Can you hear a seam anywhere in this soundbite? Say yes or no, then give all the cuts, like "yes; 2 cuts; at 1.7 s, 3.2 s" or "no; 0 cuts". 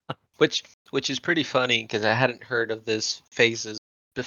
no; 0 cuts